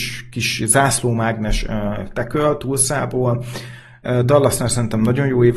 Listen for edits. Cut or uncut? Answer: uncut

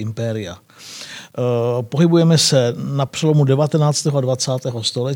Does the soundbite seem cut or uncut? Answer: uncut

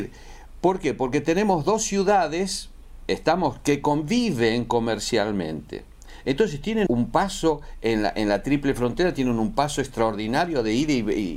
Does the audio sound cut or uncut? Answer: cut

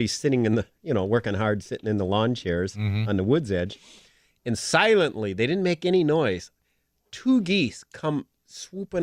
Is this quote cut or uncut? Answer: uncut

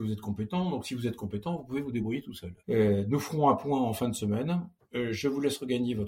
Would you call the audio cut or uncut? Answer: cut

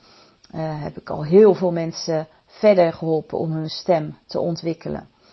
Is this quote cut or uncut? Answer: uncut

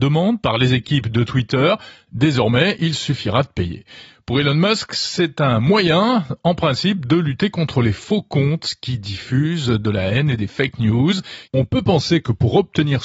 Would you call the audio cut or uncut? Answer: uncut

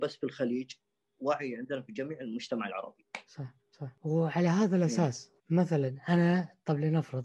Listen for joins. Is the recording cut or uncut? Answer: cut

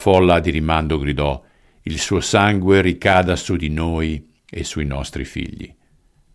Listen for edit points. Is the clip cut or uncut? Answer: uncut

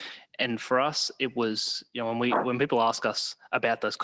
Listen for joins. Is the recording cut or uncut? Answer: uncut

